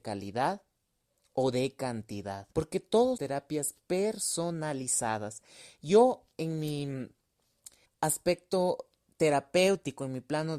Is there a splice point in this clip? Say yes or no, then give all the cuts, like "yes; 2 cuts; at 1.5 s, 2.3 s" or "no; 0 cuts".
yes; 3 cuts; at 2.5 s, 3.2 s, 7.8 s